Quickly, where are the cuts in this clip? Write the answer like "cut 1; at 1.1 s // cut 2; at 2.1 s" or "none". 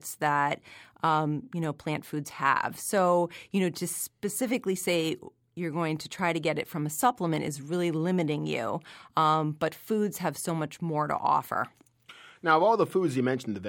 none